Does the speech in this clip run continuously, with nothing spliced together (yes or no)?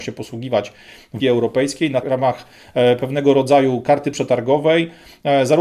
no